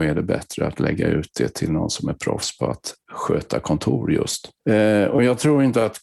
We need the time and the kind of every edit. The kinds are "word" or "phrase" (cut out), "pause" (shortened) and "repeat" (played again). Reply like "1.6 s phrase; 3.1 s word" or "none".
3.0 s pause; 4.6 s pause